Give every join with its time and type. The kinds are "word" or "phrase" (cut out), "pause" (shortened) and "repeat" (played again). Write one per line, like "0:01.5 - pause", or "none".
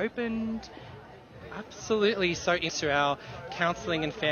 0:02.7 - word